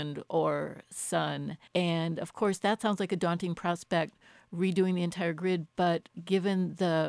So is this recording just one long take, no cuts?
no; 1 cut; at 1.7 s

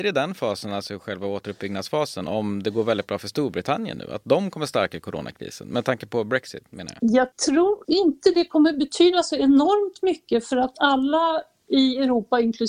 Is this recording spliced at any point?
no; 0 cuts

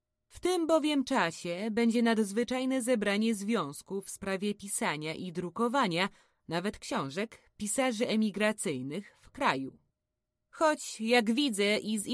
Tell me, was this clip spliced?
no; 0 cuts

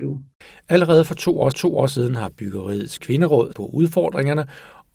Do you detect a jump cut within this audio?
yes; 2 cuts; at 1.5 s, 3.5 s

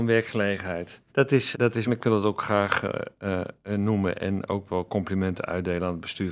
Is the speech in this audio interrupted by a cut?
yes; 3 cuts; at 1.1 s, 1.5 s, 1.9 s

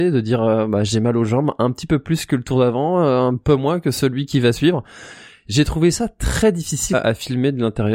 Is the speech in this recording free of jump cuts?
no; 1 cut; at 6.9 s

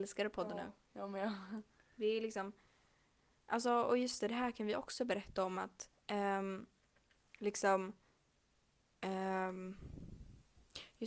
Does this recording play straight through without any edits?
no; 1 cut; at 6.0 s

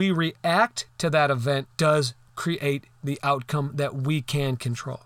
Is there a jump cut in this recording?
yes; 1 cut; at 1.7 s

